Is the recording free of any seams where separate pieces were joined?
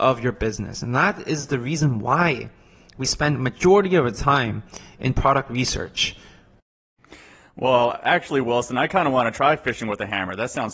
yes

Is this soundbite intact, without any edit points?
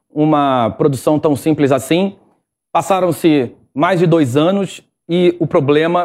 yes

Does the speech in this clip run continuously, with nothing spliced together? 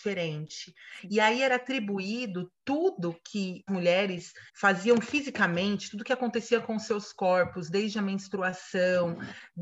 no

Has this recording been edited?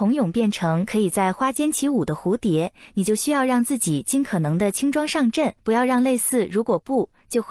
yes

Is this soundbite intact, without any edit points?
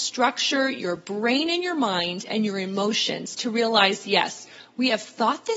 yes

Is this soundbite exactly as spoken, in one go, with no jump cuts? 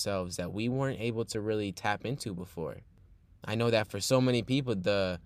yes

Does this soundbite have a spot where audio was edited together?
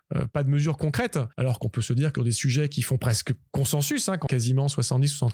yes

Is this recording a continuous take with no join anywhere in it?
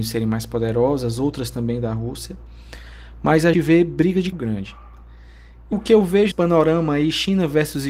no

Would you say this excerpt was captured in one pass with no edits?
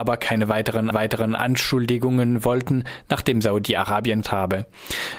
no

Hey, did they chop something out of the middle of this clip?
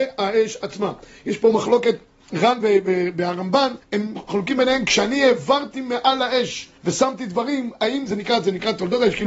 yes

